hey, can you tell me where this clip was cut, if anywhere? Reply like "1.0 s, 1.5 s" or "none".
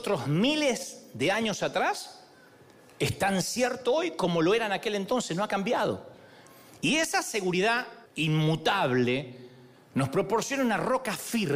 8.1 s